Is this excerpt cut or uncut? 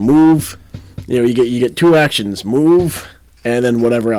uncut